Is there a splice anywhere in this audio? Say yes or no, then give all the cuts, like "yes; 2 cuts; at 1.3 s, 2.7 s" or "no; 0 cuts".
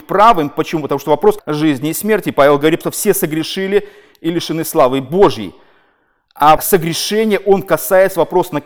yes; 3 cuts; at 1.4 s, 2.8 s, 6.6 s